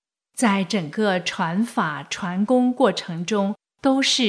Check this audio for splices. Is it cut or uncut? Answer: uncut